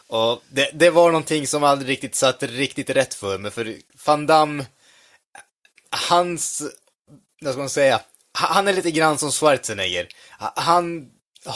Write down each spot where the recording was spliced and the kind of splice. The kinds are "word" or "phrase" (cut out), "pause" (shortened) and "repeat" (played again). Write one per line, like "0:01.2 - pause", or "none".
none